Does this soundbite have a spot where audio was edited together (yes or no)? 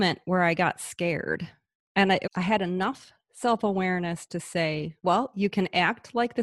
yes